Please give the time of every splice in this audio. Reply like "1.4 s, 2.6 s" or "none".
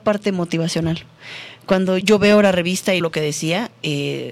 2.0 s, 3.0 s